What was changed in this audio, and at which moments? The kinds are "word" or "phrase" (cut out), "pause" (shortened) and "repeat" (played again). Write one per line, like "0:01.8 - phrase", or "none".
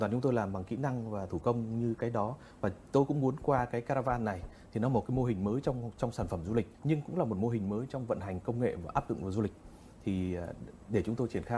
0:06.7 - pause